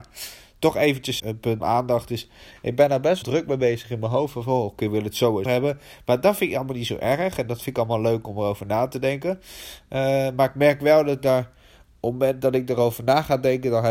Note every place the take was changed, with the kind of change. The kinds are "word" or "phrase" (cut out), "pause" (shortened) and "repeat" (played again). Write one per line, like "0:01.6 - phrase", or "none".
0:01.2 - word
0:01.6 - word
0:03.2 - word
0:05.5 - word